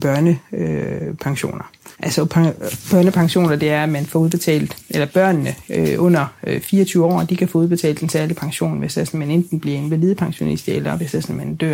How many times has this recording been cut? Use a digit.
1